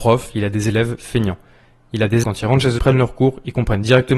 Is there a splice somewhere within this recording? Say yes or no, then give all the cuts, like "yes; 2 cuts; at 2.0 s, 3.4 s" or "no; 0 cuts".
yes; 2 cuts; at 2.2 s, 2.8 s